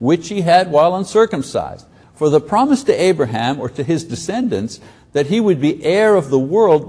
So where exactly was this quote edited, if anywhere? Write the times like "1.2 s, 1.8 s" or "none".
none

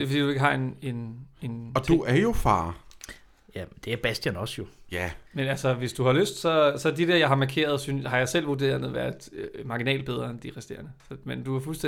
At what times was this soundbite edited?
5.2 s

